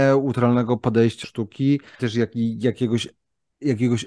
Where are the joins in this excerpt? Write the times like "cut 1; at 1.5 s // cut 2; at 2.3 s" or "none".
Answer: cut 1; at 1.2 s // cut 2; at 2.0 s